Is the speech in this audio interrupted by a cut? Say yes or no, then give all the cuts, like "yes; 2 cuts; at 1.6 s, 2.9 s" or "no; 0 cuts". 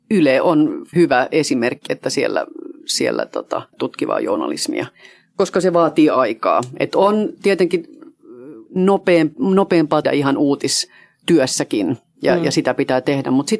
yes; 5 cuts; at 0.9 s, 1.9 s, 3.7 s, 8.7 s, 10.0 s